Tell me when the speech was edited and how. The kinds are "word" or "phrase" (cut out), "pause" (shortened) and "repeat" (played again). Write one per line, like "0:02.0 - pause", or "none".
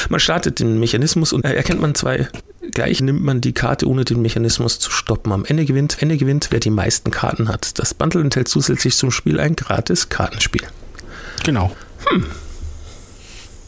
0:01.4 - word
0:03.0 - word
0:06.0 - repeat

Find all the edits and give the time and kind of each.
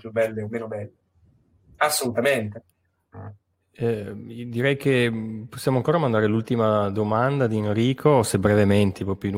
0:03.5 - pause

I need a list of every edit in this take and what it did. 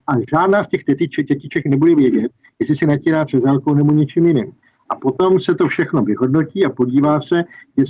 none

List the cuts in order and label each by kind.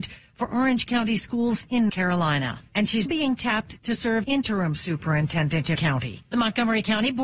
0:01.9 - word
0:03.1 - word
0:04.2 - word
0:05.8 - word

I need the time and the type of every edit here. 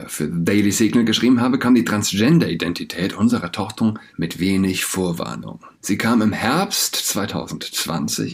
0:04.1 - phrase
0:05.7 - pause

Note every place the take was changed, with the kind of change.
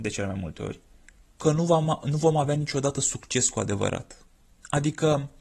0:04.3 - pause

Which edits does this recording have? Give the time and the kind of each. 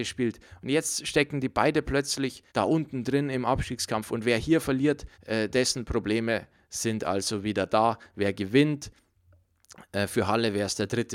0:02.5 - pause
0:05.1 - pause

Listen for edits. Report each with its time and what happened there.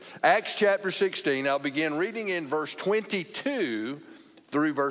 none

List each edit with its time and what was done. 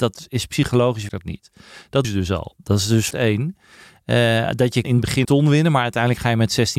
0:01.1 - word
0:02.0 - word
0:03.1 - word
0:04.8 - word
0:05.2 - word

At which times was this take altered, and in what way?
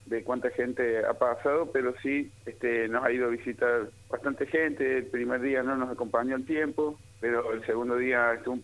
0:02.4 - pause
0:04.0 - pause
0:07.1 - pause

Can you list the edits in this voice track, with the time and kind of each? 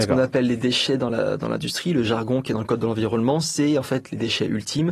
none

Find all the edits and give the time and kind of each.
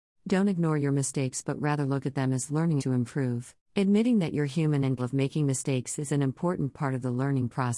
0:02.8 - word
0:03.6 - pause
0:05.0 - word

